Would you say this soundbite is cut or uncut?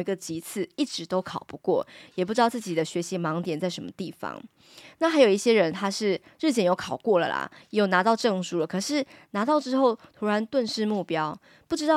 uncut